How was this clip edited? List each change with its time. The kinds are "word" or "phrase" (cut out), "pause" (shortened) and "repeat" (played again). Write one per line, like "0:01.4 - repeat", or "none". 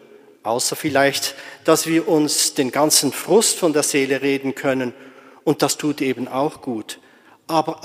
none

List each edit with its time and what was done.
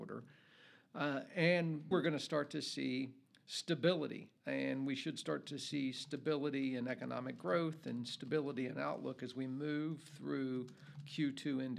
0:01.9 - word
0:04.4 - pause

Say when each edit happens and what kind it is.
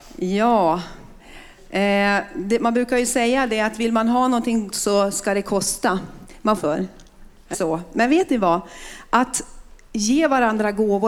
0:04.7 - word
0:06.6 - phrase
0:07.5 - word

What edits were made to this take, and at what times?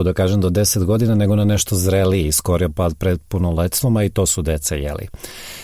none

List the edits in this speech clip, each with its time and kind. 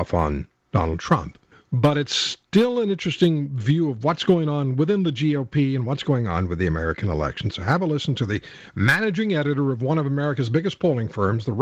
0:01.5 - pause

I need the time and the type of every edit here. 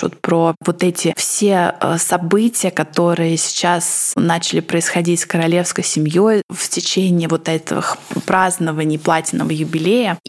none

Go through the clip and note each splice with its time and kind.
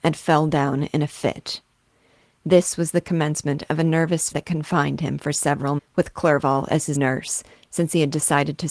0:04.3 - word
0:05.8 - word
0:06.9 - word

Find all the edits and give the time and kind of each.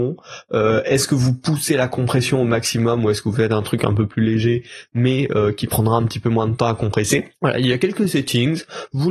0:07.3 - pause

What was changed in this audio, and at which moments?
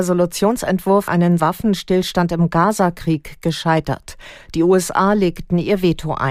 0:01.1 - word
0:01.4 - word

